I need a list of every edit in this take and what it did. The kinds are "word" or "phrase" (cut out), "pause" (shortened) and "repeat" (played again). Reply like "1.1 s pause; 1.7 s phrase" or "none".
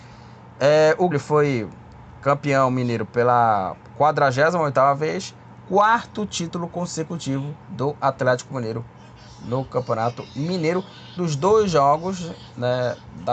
1.1 s word; 7.6 s pause; 11.2 s phrase

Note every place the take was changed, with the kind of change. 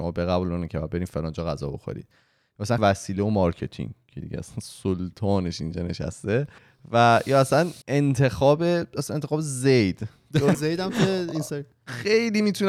2.8 s word; 6.6 s pause; 7.8 s pause; 10.5 s phrase

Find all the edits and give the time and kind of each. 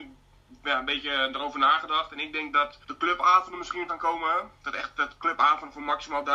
2.8 s pause; 3.9 s word; 4.6 s pause

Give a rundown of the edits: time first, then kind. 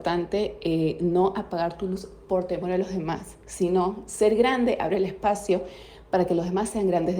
none

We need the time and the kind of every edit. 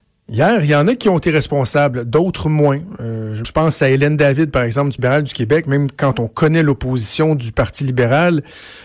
3.4 s word; 5.0 s word

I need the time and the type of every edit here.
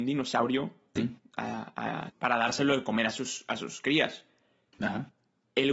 1.0 s word; 2.1 s phrase

